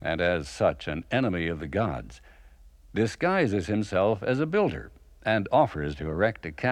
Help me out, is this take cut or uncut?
uncut